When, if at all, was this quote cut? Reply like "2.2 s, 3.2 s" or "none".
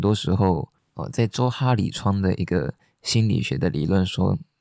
none